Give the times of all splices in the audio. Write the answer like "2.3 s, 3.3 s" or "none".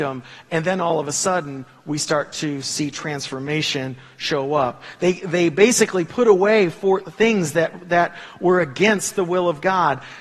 none